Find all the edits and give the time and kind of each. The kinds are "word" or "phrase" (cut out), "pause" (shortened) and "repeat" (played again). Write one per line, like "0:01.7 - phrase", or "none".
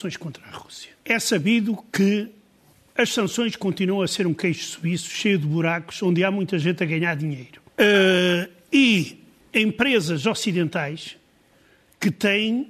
0:01.0 - pause
0:02.7 - pause
0:07.7 - pause
0:09.4 - pause